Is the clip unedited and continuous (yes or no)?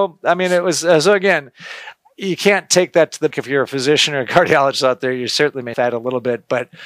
no